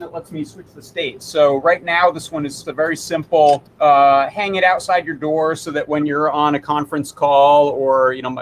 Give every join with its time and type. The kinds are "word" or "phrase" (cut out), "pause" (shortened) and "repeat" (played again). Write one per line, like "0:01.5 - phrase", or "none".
0:02.6 - word
0:03.7 - pause